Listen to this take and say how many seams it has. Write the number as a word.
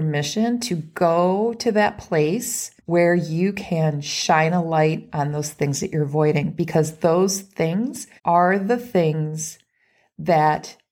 two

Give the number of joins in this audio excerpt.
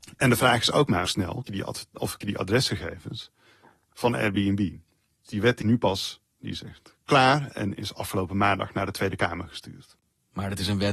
five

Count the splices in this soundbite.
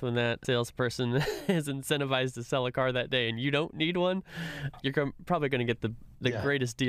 zero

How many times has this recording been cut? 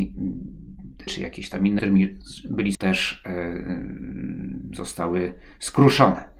three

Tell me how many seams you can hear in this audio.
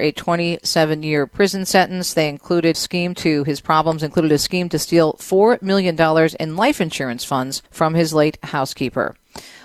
two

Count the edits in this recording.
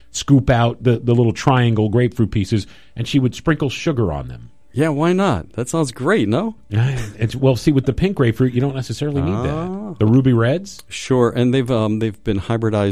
zero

